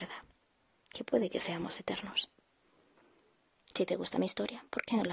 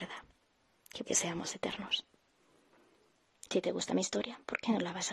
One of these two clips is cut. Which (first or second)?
second